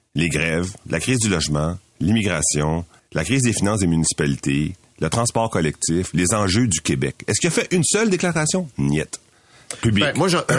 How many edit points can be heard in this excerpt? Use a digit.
1